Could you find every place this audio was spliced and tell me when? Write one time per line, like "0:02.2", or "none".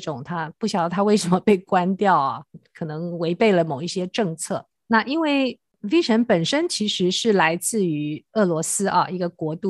0:04.8

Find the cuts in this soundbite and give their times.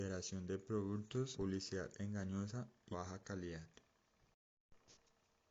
0:01.3
0:02.9

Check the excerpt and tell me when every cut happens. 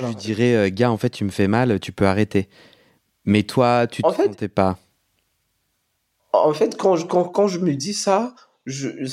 none

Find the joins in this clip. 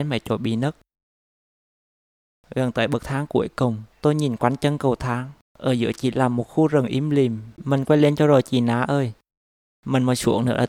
0:03.9
0:05.4
0:07.6

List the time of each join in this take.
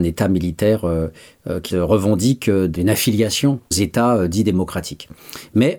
0:01.7
0:03.7

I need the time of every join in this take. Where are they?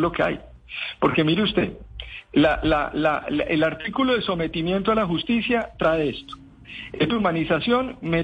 0:07.1

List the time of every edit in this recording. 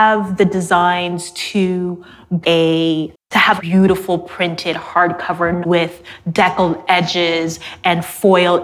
0:02.4
0:03.2
0:03.6
0:05.6

